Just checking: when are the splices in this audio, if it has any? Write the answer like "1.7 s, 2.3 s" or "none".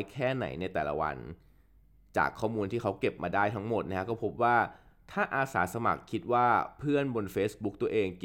none